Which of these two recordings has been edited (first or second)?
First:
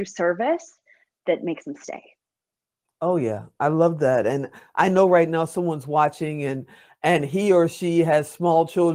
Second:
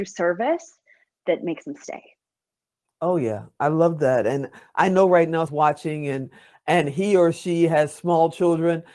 second